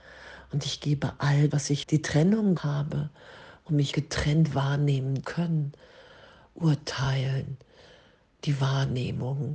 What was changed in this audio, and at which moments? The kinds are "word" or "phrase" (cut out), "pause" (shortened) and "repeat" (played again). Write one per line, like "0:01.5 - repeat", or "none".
0:01.5 - word
0:01.8 - word
0:02.6 - word
0:03.9 - word
0:05.2 - word